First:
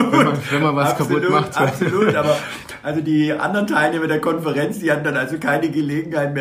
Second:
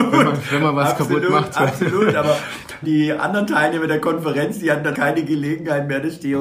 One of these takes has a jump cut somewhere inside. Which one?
second; 2 cuts; at 2.8 s, 4.9 s

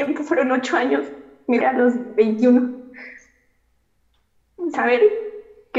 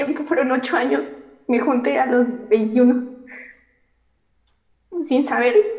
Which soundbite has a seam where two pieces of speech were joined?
first; 2 cuts; at 1.6 s, 4.7 s

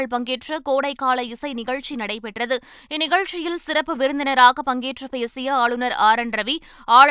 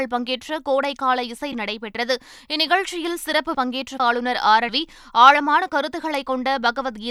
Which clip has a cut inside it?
second; 4 cuts; at 1.5 s, 3.5 s, 4.0 s, 4.7 s

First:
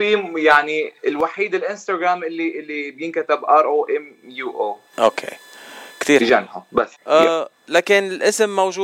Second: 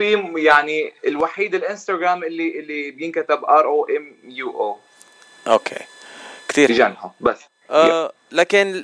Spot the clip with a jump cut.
first; 2 cuts; at 4.9 s, 7.0 s

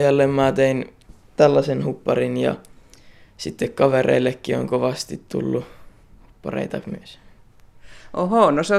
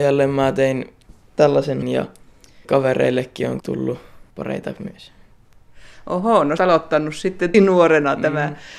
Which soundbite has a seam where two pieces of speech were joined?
second; 6 cuts; at 1.8 s, 2.6 s, 3.6 s, 4.3 s, 6.6 s, 7.5 s

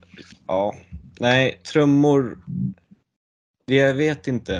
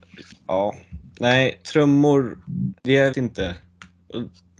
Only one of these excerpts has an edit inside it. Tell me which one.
second; 2 cuts; at 2.8 s, 3.1 s

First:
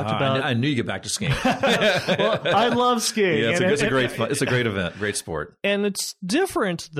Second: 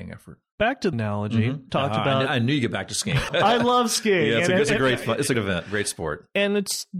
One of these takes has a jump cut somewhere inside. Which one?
second; 4 cuts; at 0.9 s, 1.7 s, 3.3 s, 5.3 s

